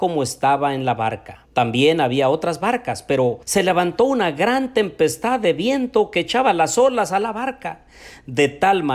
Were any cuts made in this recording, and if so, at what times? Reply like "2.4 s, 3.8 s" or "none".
1.5 s, 3.4 s